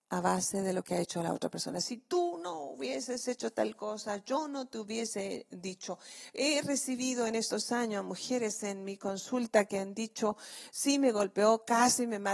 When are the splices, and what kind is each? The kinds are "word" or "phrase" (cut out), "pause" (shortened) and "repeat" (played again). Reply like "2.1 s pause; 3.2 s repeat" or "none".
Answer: none

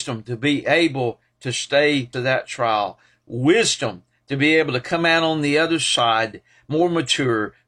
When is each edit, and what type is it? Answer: 2.1 s phrase

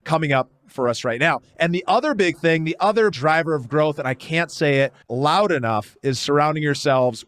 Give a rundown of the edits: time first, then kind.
3.1 s word; 5.0 s pause

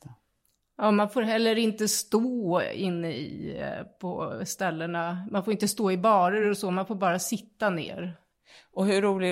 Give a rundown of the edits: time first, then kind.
none

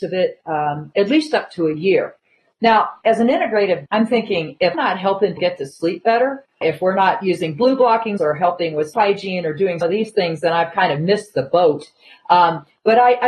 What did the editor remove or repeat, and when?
3.9 s word; 4.7 s word; 5.4 s word; 6.6 s word; 8.2 s word; 8.9 s word; 9.8 s word

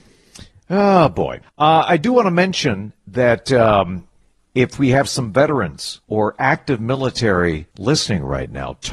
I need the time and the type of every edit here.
1.4 s pause; 4.2 s pause; 6.0 s pause; 7.7 s pause

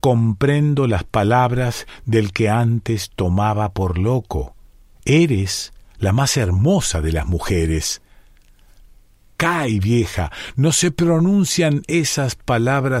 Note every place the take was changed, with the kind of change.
none

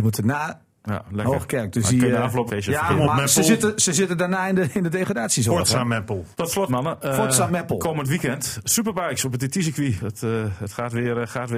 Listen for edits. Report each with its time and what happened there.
2.5 s word; 6.3 s pause; 6.7 s word; 10.0 s word

